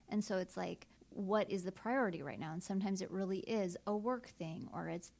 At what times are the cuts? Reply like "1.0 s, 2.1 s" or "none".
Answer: 1.0 s